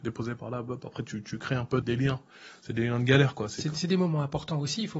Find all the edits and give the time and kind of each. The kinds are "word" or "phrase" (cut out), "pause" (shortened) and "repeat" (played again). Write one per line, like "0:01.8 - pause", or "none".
0:01.8 - word